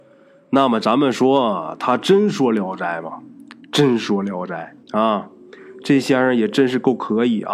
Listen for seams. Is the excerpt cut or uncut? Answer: cut